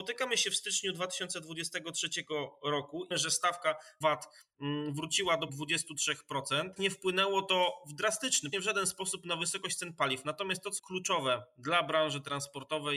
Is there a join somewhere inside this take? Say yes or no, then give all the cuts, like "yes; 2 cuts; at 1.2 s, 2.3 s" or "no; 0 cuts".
yes; 6 cuts; at 3.1 s, 4.0 s, 5.5 s, 6.8 s, 8.5 s, 10.8 s